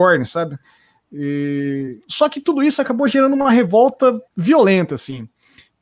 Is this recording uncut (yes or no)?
no